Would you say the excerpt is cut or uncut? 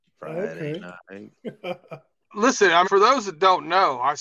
cut